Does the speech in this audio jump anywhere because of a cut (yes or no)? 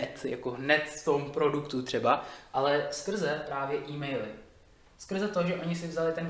no